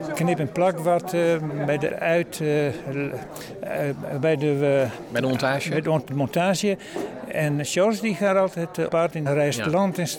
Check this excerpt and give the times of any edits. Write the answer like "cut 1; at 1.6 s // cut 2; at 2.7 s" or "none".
cut 1; at 1.9 s // cut 2; at 6.1 s // cut 3; at 8.9 s // cut 4; at 9.3 s